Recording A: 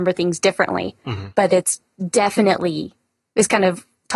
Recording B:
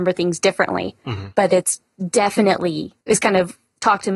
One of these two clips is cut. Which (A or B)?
B